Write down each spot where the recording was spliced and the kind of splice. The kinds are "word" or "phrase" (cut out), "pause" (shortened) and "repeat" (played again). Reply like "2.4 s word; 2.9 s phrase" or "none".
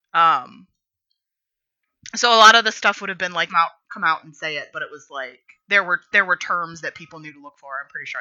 3.5 s phrase; 5.6 s pause